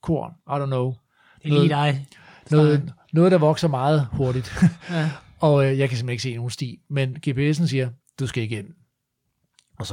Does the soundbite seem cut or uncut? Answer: uncut